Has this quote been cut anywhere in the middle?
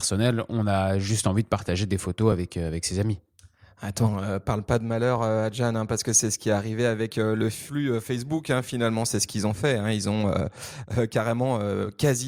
no; 0 cuts

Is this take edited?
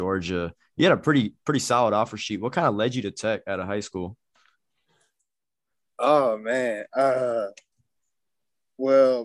no; 0 cuts

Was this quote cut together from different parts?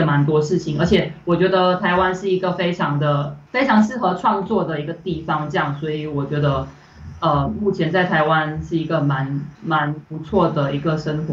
yes; 1 cut; at 9.5 s

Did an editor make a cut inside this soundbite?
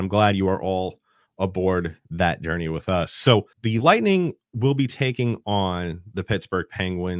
yes; 1 cut; at 3.5 s

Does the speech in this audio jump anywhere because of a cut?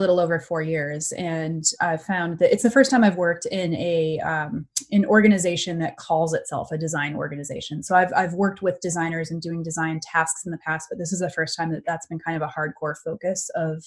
no; 0 cuts

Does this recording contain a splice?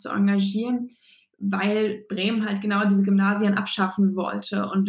no; 0 cuts

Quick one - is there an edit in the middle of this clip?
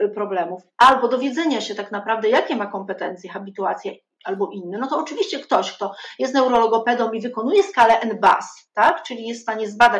no; 0 cuts

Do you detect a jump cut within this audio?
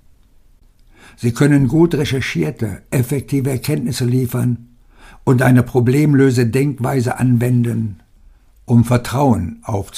no; 0 cuts

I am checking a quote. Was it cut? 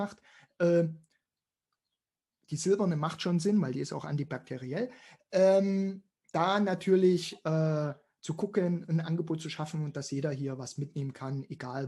no; 0 cuts

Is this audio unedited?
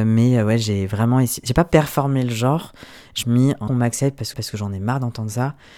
no; 3 cuts; at 3.2 s, 3.7 s, 4.3 s

